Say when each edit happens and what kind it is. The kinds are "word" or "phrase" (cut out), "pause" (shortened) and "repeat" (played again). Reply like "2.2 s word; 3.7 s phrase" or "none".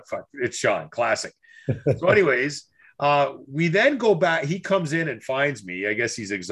none